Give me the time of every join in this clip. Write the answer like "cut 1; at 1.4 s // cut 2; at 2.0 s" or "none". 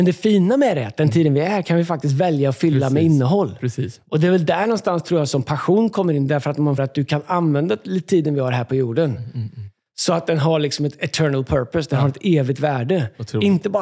cut 1; at 6.8 s